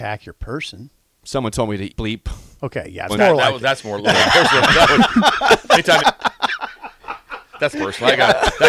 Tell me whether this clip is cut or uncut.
cut